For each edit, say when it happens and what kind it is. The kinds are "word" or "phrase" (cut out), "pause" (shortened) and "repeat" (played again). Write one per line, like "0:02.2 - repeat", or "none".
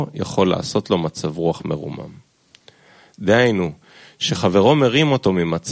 none

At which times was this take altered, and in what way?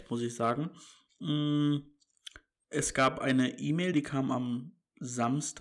none

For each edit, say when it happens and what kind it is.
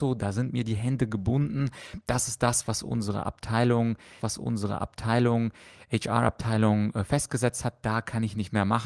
0:04.2 - repeat

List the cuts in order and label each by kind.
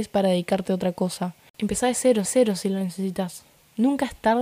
0:02.2 - repeat

